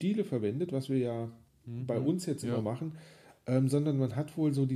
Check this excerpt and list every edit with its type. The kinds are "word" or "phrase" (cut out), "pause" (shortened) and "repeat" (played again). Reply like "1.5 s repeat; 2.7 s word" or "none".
1.5 s pause